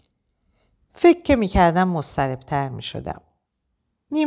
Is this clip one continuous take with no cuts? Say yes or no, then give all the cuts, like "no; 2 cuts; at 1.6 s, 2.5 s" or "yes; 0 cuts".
yes; 0 cuts